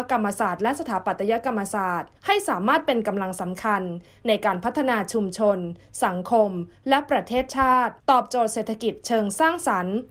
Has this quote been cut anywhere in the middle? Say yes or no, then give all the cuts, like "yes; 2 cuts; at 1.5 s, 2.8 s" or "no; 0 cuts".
yes; 2 cuts; at 2.2 s, 8.0 s